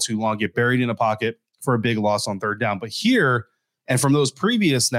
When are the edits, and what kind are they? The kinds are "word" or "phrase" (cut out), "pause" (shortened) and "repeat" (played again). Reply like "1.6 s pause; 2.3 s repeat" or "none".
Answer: none